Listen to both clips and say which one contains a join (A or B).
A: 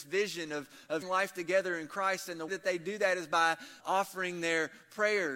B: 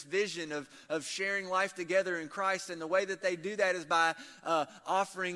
A